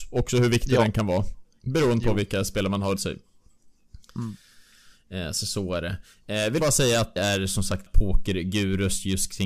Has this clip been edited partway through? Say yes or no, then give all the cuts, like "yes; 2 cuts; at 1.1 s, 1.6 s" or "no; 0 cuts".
yes; 4 cuts; at 3.0 s, 6.6 s, 7.2 s, 7.9 s